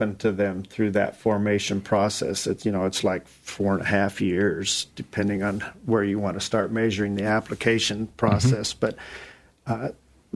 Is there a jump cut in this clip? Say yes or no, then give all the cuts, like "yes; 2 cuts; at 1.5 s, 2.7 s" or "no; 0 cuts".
no; 0 cuts